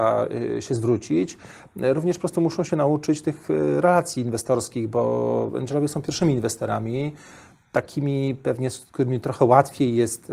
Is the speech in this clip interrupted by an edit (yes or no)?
no